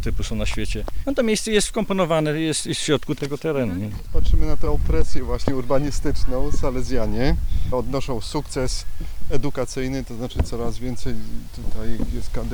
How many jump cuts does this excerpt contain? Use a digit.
0